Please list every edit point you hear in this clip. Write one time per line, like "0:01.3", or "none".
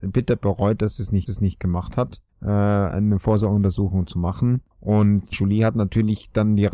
0:01.3
0:02.3
0:04.7
0:05.3